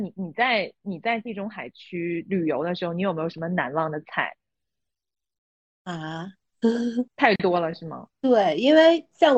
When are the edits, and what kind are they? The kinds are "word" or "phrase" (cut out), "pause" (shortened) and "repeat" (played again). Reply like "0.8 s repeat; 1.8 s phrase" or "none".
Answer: 7.1 s pause; 8.1 s pause